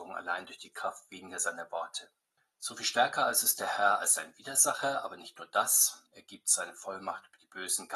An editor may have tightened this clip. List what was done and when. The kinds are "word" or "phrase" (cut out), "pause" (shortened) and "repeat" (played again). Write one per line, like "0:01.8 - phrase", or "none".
0:02.4 - pause
0:06.1 - pause